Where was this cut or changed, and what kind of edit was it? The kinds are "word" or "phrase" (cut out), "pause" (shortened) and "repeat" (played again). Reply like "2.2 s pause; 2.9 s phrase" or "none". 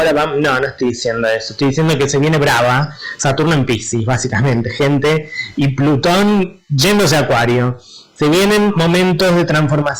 none